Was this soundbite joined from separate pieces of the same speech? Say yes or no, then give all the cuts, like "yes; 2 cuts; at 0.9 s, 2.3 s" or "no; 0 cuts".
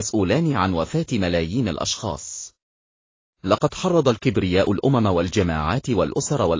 no; 0 cuts